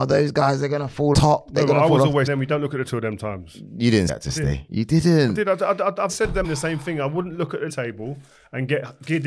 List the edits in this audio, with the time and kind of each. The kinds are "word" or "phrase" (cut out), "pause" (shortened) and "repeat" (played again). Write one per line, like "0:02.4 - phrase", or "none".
0:01.1 - word
0:02.3 - word
0:02.9 - word
0:04.1 - word
0:06.1 - word
0:06.4 - word
0:07.7 - word

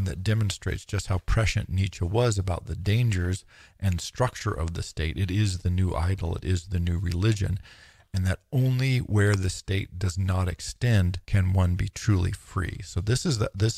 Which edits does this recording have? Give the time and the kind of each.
0:11.2 - pause

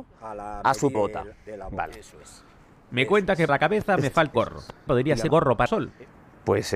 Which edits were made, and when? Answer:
0:00.9 - word
0:03.5 - word
0:04.3 - word
0:04.9 - phrase
0:05.3 - word
0:05.7 - word

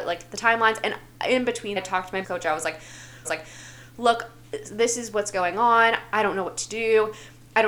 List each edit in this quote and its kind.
0:01.8 - phrase
0:02.2 - word
0:03.2 - repeat

